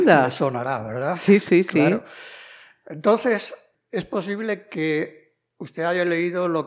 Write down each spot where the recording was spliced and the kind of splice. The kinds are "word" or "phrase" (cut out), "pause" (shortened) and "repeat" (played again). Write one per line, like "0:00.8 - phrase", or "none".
0:01.4 - word